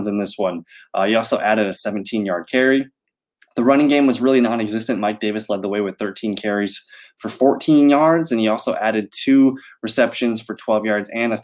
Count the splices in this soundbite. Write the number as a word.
zero